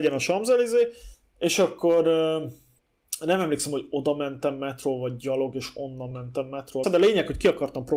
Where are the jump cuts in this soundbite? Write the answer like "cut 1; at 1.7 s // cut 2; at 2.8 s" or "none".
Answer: cut 1; at 6.8 s